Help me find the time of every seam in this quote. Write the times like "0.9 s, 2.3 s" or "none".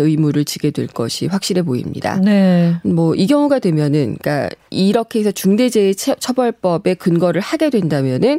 none

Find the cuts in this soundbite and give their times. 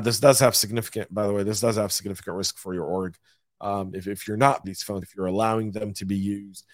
4.6 s, 5.0 s

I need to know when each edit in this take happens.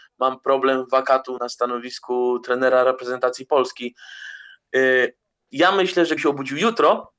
1.4 s, 6.2 s

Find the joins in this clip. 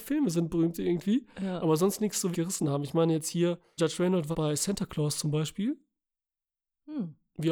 2.3 s, 3.8 s, 4.3 s

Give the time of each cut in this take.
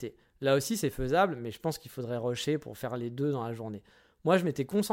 none

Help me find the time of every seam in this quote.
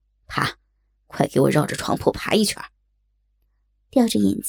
2.8 s

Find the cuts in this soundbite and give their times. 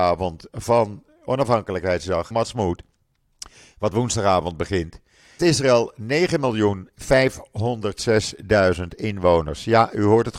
2.3 s, 5.4 s

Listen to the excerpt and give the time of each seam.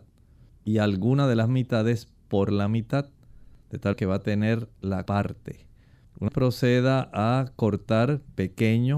3.9 s, 5.1 s, 6.3 s

